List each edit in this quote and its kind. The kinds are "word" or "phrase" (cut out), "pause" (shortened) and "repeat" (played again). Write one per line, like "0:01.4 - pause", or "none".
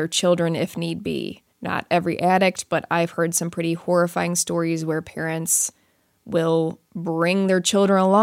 0:01.5 - pause